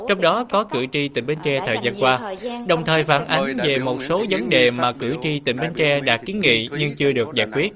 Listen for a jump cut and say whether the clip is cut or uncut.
uncut